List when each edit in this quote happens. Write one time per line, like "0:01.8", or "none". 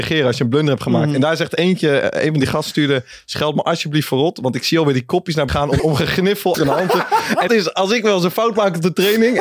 0:05.5
0:05.8
0:06.5
0:07.5

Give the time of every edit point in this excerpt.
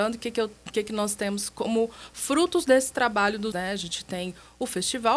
0:03.5

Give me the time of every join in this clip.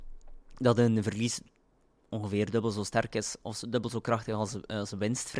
none

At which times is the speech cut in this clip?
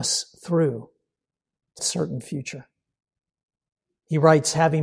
0:01.8

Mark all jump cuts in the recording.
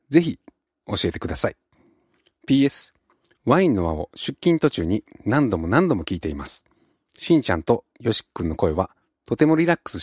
none

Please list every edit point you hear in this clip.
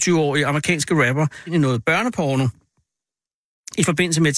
0:01.5

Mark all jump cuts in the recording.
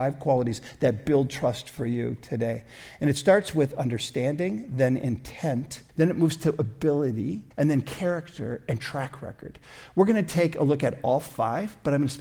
0:05.9
0:07.5

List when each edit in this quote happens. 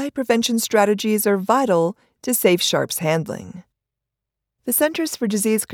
none

